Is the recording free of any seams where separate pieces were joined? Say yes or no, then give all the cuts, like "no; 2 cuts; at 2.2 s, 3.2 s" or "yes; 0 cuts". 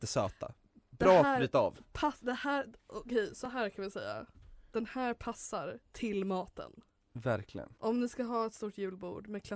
no; 2 cuts; at 5.8 s, 7.8 s